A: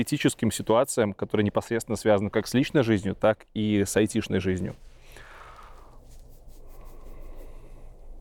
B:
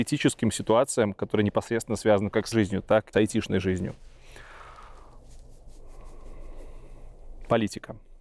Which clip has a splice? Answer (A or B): B